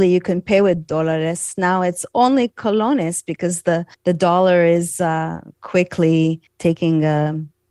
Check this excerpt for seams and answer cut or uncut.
cut